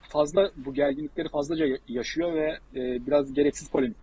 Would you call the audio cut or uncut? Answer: uncut